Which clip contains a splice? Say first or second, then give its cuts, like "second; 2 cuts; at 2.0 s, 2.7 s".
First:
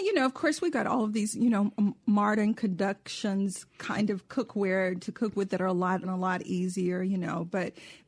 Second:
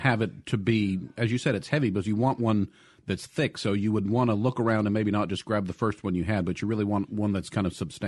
first; 1 cut; at 6.0 s